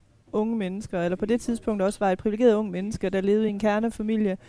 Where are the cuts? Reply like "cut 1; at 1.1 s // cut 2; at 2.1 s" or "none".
none